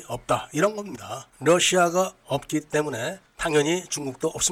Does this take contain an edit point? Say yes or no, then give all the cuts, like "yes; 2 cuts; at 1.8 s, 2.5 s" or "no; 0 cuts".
no; 0 cuts